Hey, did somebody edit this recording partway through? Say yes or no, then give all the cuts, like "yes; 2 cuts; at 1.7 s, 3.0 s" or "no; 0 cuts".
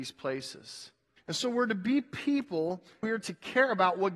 yes; 2 cuts; at 1.2 s, 3.0 s